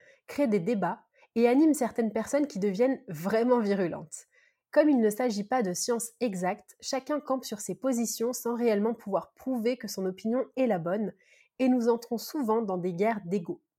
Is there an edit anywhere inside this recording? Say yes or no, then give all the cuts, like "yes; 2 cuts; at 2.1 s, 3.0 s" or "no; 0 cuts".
no; 0 cuts